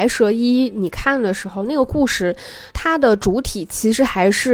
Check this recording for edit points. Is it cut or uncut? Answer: cut